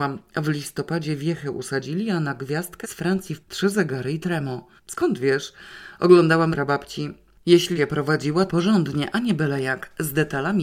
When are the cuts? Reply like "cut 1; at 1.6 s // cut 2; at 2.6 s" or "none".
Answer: cut 1; at 2.8 s // cut 2; at 3.4 s // cut 3; at 4.8 s // cut 4; at 6.5 s // cut 5; at 7.8 s // cut 6; at 8.5 s